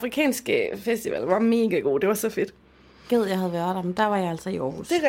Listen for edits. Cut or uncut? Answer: uncut